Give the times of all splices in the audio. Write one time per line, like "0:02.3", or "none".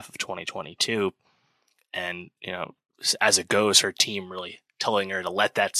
none